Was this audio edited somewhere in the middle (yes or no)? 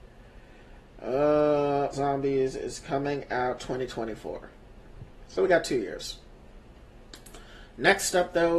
yes